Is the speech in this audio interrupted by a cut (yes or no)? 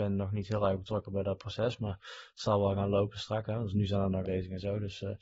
yes